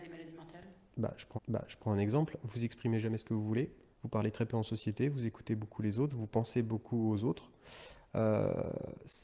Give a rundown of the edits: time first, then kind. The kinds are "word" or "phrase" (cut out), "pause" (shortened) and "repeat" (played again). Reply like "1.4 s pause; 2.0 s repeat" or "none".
1.3 s repeat; 3.9 s pause

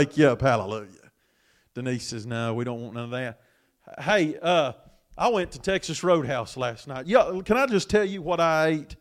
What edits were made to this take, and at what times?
none

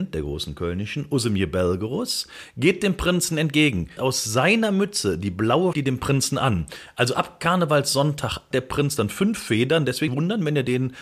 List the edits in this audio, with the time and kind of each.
4.0 s word; 5.7 s phrase; 8.5 s word; 10.1 s word

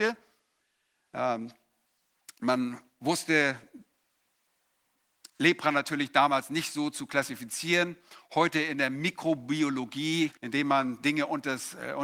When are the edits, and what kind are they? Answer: 10.4 s pause

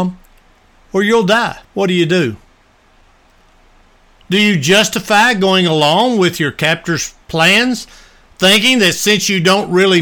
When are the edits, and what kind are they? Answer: 1.6 s pause; 7.2 s pause

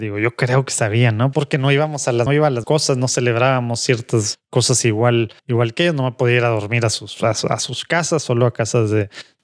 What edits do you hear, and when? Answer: 1.3 s word; 2.3 s word; 2.6 s word; 5.4 s pause

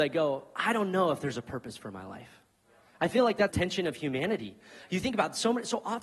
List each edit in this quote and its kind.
3.5 s word

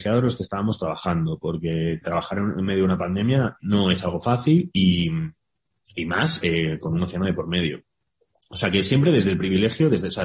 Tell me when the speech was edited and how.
3.6 s word

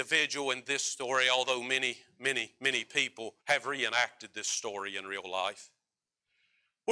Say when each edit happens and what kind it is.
3.4 s pause

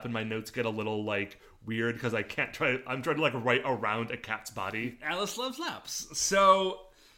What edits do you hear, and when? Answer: none

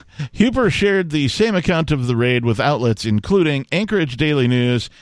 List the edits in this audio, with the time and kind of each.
none

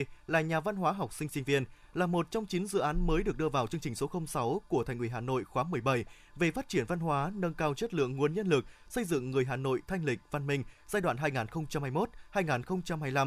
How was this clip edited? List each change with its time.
none

